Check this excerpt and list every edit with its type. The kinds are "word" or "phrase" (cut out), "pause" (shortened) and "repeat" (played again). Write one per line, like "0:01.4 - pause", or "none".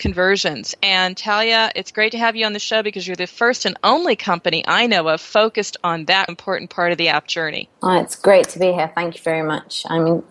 0:06.3 - word
0:07.7 - pause